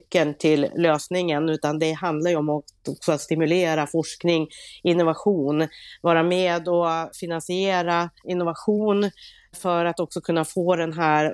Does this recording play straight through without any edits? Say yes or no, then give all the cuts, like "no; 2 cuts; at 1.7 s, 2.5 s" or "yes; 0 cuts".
no; 1 cut; at 8.2 s